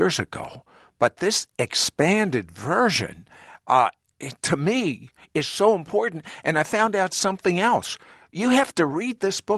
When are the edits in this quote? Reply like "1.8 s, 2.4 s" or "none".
none

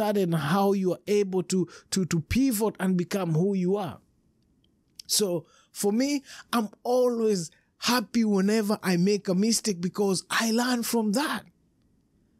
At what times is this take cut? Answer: 2.1 s

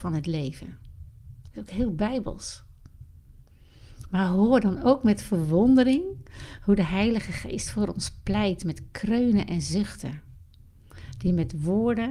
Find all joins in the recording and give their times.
none

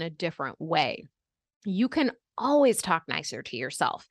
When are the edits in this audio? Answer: none

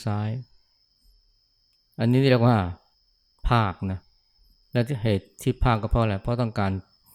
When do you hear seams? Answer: 2.9 s

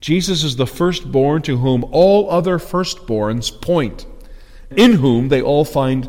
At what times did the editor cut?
4.7 s

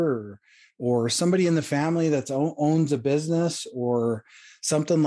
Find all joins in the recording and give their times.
none

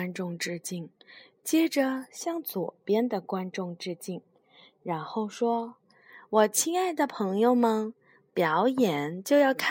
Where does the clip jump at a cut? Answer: none

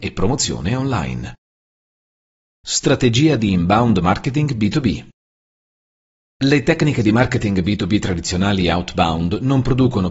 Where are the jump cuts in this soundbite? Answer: none

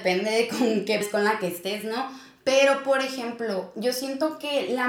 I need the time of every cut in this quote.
1.0 s

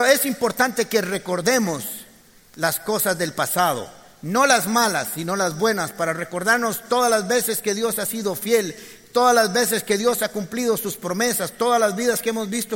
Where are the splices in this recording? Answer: none

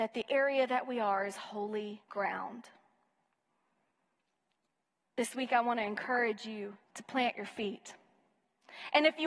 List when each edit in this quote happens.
2.0 s, 6.8 s

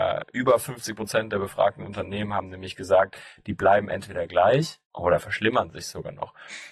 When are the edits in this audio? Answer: 4.8 s

